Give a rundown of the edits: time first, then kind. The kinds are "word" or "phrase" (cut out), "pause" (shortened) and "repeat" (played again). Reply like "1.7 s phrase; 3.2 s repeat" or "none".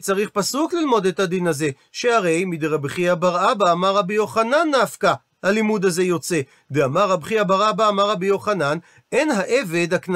none

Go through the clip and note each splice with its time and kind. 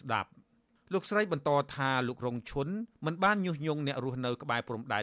2.9 s pause

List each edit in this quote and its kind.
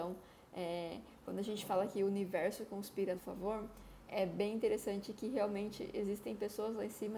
3.2 s word; 4.1 s word

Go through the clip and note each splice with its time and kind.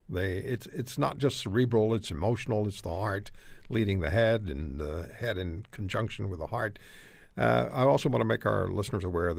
none

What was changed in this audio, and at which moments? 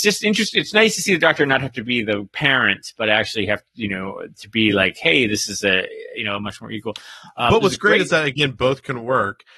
none

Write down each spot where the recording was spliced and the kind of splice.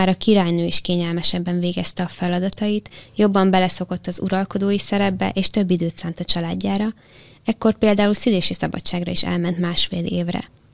none

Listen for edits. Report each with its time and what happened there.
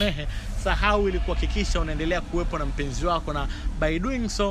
none

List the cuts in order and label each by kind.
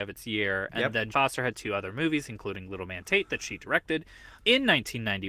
1.1 s word; 4.4 s word

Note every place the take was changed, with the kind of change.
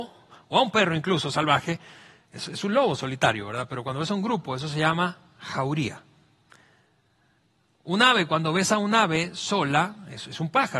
none

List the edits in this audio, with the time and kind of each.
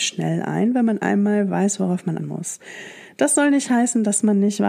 2.2 s word

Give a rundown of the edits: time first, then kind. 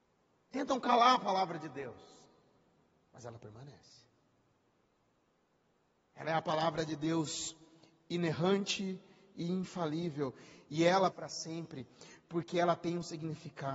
11.1 s word

